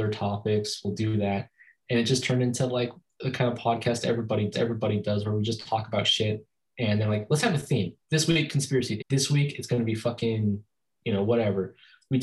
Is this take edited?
yes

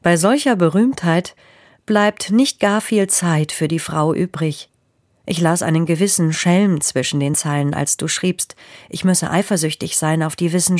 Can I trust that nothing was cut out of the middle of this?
yes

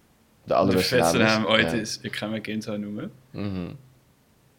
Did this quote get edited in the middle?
no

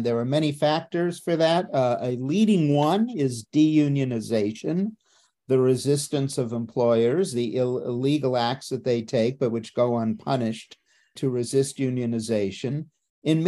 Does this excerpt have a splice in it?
no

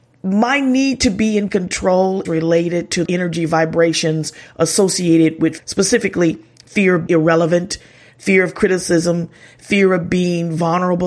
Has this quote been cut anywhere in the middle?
yes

